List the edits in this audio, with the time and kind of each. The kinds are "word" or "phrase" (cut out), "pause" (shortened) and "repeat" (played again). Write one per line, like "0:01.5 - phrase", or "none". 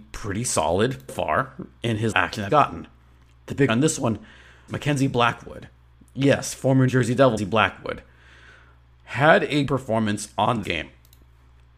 0:01.1 - word
0:02.1 - word
0:02.5 - word
0:03.7 - word
0:04.7 - word
0:06.9 - word
0:07.4 - word
0:09.7 - word
0:10.6 - word

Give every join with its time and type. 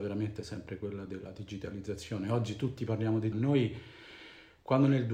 0:03.3 - phrase

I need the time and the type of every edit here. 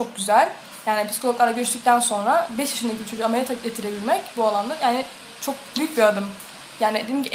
none

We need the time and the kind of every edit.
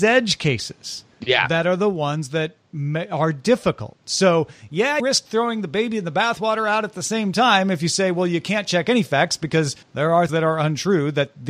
0:01.1 - pause
0:05.0 - word
0:09.8 - pause
0:10.3 - word

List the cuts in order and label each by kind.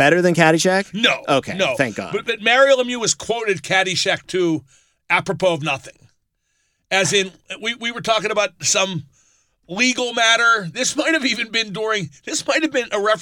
none

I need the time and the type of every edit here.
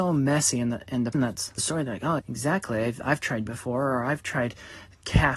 0:01.1 - word
0:01.6 - phrase
0:02.2 - word
0:03.5 - word

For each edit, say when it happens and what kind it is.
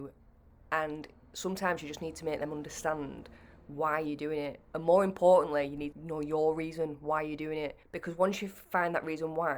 0:04.6 - pause
0:05.9 - word
0:07.8 - pause

